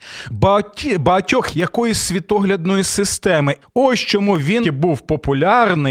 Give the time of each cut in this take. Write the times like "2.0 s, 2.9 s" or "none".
1.5 s, 3.6 s, 4.6 s